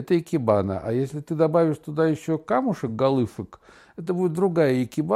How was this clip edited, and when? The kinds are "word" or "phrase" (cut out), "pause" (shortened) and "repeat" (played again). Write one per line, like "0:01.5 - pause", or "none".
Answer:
none